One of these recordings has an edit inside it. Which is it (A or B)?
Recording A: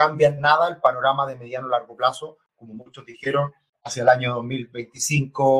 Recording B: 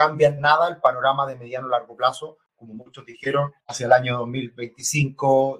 B